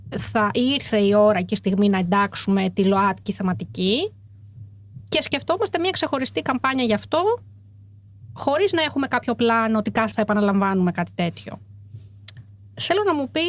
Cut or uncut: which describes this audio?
cut